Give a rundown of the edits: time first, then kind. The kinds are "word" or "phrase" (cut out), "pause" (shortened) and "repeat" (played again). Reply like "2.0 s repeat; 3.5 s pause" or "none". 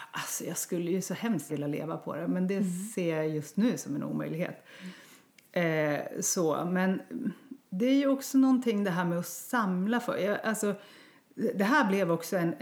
1.5 s word; 7.6 s pause